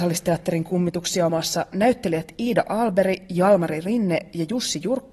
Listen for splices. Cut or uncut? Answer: cut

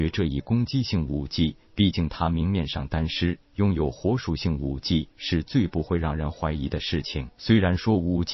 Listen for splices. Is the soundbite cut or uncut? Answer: cut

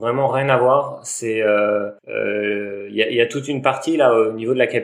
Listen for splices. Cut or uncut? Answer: cut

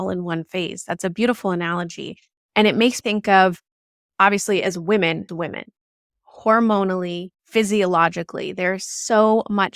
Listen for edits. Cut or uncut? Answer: cut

